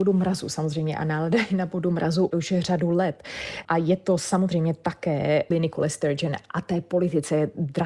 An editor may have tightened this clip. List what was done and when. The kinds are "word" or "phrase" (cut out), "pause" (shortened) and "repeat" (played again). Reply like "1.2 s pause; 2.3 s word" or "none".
5.5 s word